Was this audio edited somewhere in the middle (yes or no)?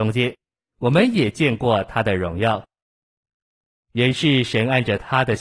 no